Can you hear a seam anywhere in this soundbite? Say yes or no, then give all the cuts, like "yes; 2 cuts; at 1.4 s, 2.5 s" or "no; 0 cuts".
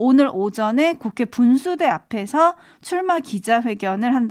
no; 0 cuts